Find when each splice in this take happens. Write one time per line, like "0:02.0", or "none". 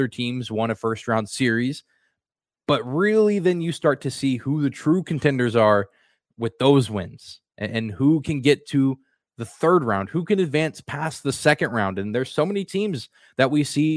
none